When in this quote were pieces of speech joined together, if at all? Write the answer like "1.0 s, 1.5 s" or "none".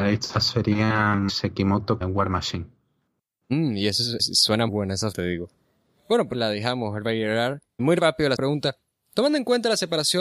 1.3 s, 2.0 s, 4.2 s, 4.7 s, 5.1 s, 6.3 s, 7.8 s, 8.4 s